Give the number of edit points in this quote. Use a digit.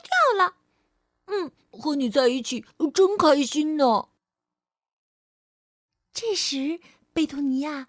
0